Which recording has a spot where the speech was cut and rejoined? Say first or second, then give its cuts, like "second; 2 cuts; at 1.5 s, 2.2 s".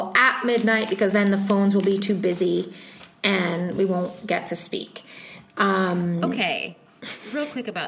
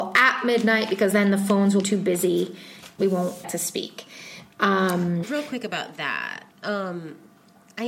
second; 5 cuts; at 1.8 s, 3.0 s, 3.4 s, 5.2 s, 6.5 s